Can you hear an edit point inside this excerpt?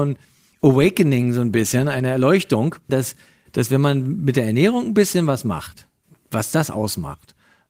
yes; 1 cut; at 2.9 s

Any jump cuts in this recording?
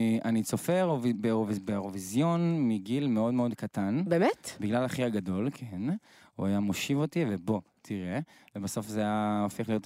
no; 0 cuts

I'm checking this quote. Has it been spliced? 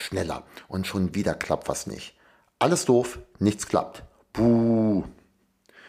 no; 0 cuts

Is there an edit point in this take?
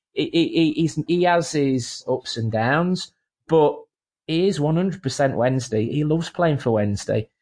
yes; 1 cut; at 1.1 s

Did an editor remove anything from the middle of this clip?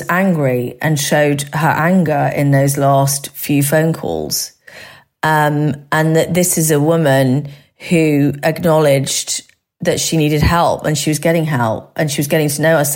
no; 0 cuts

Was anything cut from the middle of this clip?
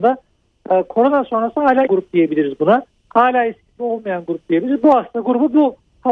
yes; 2 cuts; at 1.9 s, 3.8 s

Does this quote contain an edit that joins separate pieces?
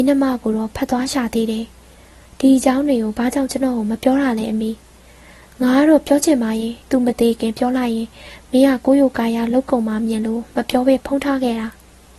yes; 1 cut; at 6.8 s

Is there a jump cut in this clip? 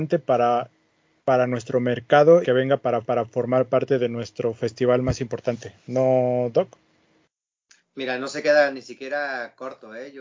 yes; 2 cuts; at 2.4 s, 3.0 s

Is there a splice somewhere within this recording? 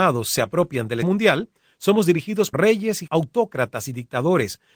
yes; 3 cuts; at 1.0 s, 2.5 s, 3.1 s

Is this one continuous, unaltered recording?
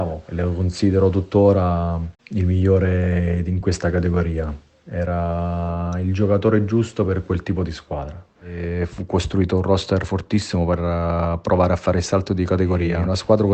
yes; 0 cuts

